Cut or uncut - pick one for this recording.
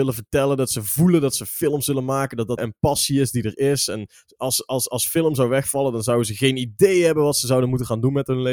cut